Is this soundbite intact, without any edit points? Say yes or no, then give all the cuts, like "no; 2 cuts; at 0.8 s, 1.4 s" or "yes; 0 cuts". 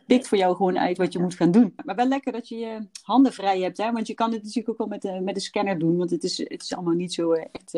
yes; 0 cuts